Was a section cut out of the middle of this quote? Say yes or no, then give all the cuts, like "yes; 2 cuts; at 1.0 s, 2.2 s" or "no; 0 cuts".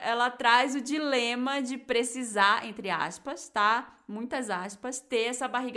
no; 0 cuts